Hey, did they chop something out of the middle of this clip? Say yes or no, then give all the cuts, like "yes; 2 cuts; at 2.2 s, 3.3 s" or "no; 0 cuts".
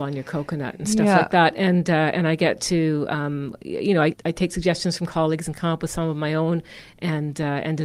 yes; 1 cut; at 4.1 s